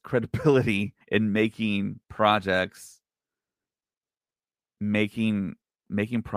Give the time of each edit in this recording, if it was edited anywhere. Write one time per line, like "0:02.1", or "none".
0:01.0
0:02.0